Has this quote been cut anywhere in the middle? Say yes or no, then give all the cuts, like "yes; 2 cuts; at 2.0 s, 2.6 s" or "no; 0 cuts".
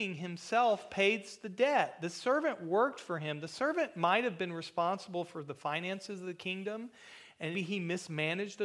yes; 1 cut; at 7.5 s